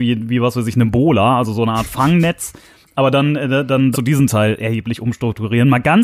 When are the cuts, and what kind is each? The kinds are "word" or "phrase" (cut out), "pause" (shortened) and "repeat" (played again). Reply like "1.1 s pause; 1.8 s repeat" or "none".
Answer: 3.9 s phrase